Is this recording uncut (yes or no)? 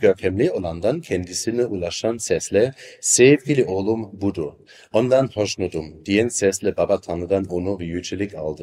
yes